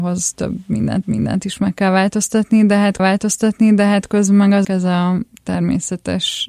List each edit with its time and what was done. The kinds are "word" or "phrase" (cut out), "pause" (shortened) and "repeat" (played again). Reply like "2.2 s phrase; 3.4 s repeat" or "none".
1.0 s repeat; 3.0 s repeat; 4.6 s word